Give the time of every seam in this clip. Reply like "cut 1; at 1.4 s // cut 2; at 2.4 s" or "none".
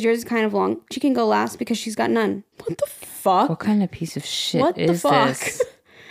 cut 1; at 0.9 s // cut 2; at 2.5 s